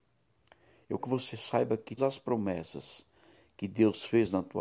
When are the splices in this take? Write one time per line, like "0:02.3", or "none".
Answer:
0:01.0
0:02.0